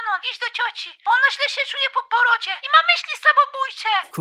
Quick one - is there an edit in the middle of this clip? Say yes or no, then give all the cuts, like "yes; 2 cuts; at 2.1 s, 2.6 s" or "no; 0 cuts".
no; 0 cuts